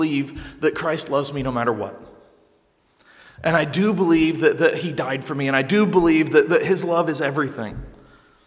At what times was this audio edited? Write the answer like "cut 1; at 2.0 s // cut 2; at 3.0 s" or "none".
none

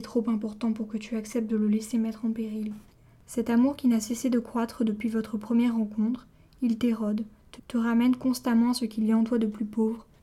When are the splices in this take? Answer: cut 1; at 7.6 s

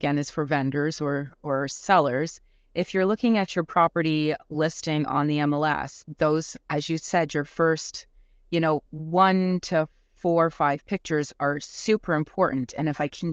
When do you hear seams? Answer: cut 1; at 8.9 s

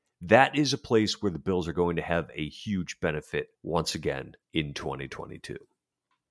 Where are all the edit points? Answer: cut 1; at 3.6 s // cut 2; at 4.4 s

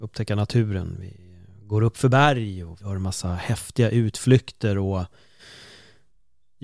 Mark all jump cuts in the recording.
cut 1; at 2.8 s

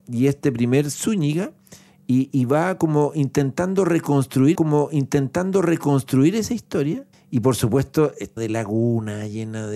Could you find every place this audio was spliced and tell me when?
cut 1; at 2.3 s // cut 2; at 4.5 s // cut 3; at 7.1 s // cut 4; at 8.4 s

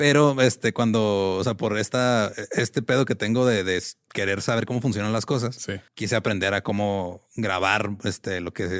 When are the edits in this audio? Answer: cut 1; at 5.9 s

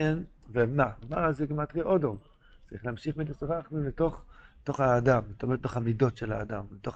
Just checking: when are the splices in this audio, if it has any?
none

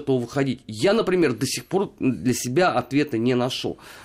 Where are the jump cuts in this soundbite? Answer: none

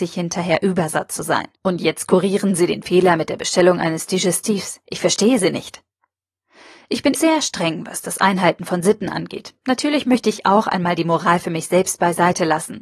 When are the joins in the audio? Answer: cut 1; at 1.6 s // cut 2; at 4.8 s // cut 3; at 7.1 s

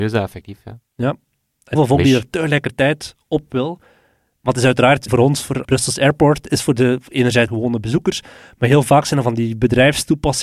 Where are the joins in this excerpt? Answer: cut 1; at 1.8 s // cut 2; at 5.1 s // cut 3; at 5.6 s // cut 4; at 7.5 s

